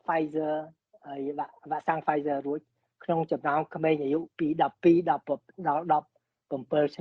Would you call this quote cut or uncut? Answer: uncut